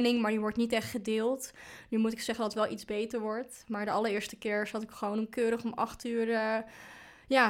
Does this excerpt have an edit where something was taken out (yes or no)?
no